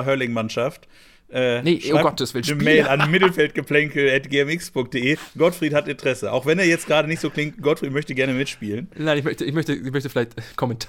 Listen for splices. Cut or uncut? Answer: uncut